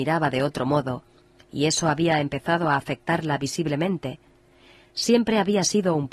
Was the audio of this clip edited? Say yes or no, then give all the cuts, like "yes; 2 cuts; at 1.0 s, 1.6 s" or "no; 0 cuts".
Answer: no; 0 cuts